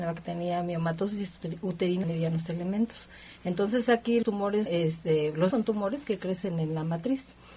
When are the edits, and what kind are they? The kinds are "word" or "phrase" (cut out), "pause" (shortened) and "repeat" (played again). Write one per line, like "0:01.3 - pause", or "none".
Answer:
0:02.0 - word
0:04.2 - word
0:04.7 - word
0:05.5 - word